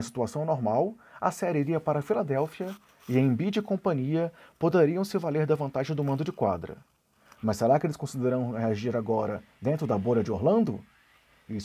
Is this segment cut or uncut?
uncut